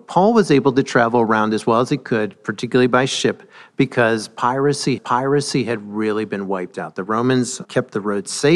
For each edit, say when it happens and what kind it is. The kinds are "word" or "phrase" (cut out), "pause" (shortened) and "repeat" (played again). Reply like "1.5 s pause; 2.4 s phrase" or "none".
5.0 s repeat; 7.6 s word